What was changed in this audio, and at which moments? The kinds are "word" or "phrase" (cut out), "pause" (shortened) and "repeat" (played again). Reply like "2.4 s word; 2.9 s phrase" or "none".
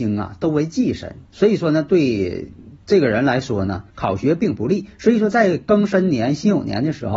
1.3 s pause; 2.8 s pause; 3.9 s pause